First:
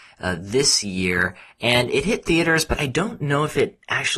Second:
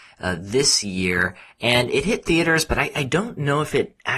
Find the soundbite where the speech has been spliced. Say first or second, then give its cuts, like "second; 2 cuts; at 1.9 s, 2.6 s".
first; 1 cut; at 2.7 s